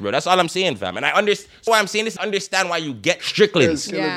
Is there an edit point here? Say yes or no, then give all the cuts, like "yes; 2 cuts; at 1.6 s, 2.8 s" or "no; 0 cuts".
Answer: yes; 3 cuts; at 1.7 s, 2.2 s, 3.2 s